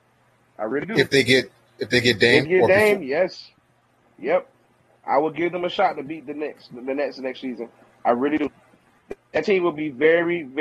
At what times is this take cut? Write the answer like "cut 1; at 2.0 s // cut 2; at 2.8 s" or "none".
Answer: cut 1; at 2.4 s